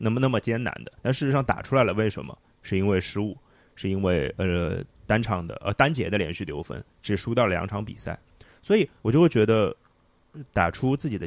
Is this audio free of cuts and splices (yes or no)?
no